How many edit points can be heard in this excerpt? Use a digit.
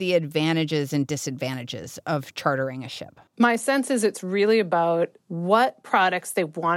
2